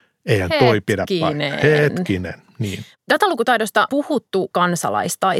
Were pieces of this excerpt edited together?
yes; 2 cuts; at 3.9 s, 4.5 s

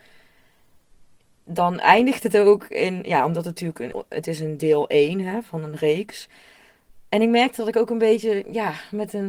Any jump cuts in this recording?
yes; 1 cut; at 3.9 s

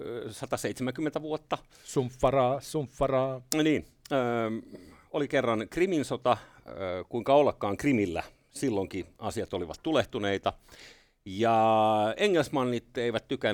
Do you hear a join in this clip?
no; 0 cuts

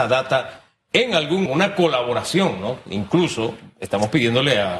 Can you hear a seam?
yes; 1 cut; at 1.5 s

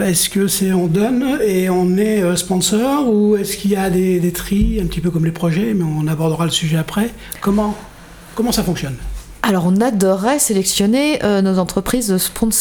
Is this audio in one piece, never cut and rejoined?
yes; 0 cuts

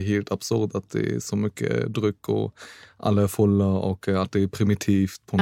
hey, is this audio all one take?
yes; 0 cuts

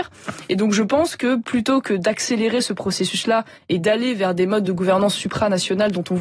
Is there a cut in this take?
no; 0 cuts

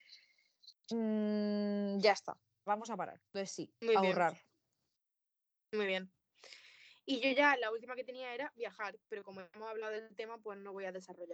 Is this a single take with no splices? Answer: no; 2 cuts; at 2.7 s, 3.3 s

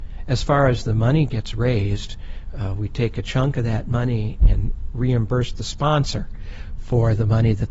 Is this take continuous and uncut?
yes; 0 cuts

